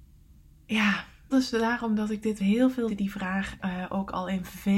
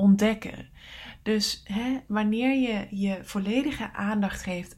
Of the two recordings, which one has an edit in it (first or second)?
first